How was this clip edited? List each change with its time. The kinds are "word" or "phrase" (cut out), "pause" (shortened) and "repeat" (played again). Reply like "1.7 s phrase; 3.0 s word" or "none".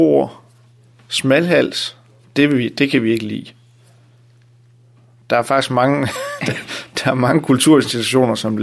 none